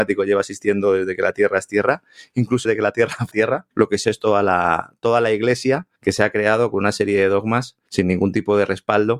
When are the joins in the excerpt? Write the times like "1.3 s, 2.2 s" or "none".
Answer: 2.6 s, 3.3 s, 3.7 s, 4.0 s, 6.0 s, 7.9 s